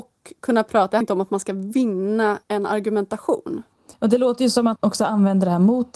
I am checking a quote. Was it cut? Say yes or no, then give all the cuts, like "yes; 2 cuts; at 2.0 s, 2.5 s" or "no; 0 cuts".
yes; 4 cuts; at 1.0 s, 2.4 s, 3.9 s, 4.8 s